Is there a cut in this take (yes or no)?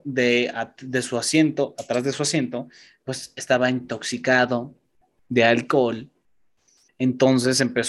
no